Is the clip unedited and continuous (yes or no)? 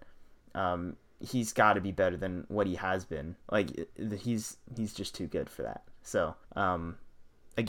no